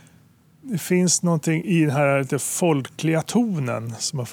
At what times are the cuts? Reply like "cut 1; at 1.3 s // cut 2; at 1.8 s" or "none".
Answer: none